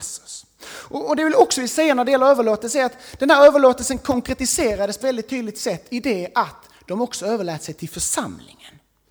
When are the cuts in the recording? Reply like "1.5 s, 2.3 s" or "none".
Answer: 5.0 s